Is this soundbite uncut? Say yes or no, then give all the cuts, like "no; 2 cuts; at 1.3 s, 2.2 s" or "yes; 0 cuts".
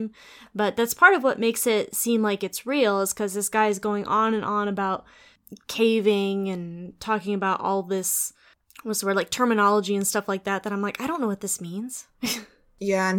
no; 1 cut; at 12.1 s